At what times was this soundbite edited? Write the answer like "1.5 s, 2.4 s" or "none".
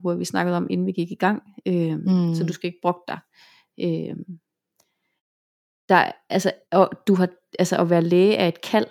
6.6 s